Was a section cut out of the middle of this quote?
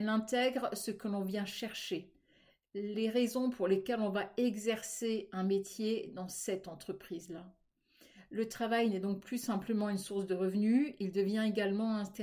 no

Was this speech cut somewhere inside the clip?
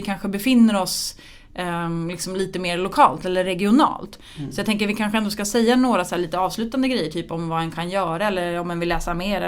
no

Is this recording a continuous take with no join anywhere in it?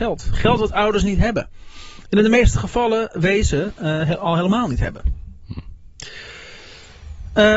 yes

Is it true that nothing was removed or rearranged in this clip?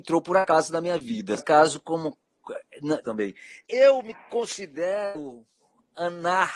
no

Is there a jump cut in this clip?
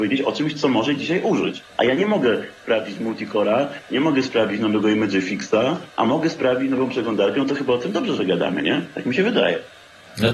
yes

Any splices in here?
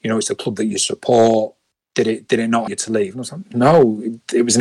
yes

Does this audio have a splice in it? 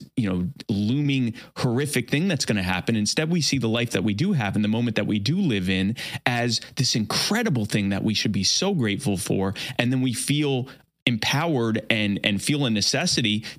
no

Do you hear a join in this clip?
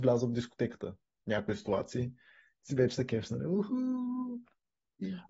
no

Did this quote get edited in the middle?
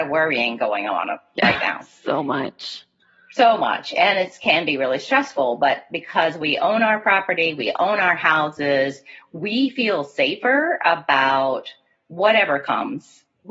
no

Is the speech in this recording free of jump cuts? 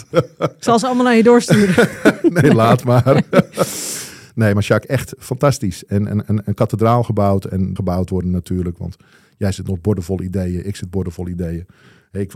no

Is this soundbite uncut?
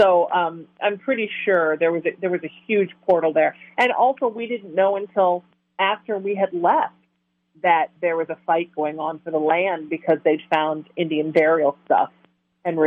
yes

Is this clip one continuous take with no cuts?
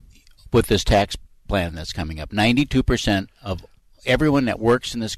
yes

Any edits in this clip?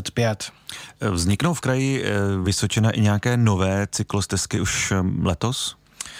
no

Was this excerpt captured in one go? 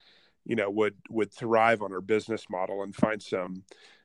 yes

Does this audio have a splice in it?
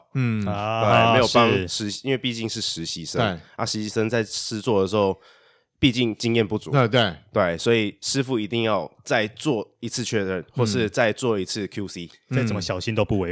no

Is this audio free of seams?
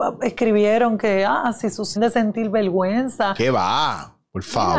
no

